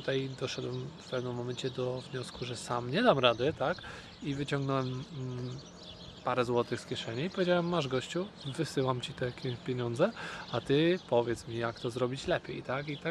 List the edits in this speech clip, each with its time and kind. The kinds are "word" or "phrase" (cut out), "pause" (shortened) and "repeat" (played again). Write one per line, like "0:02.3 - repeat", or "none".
none